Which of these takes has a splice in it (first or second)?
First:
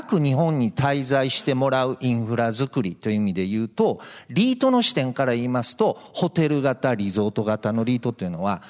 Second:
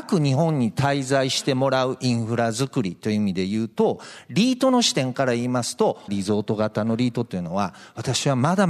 second